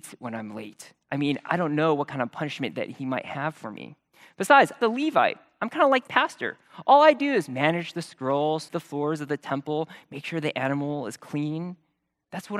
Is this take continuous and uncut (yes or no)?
no